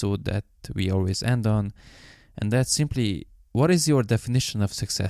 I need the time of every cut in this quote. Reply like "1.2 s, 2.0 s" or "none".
none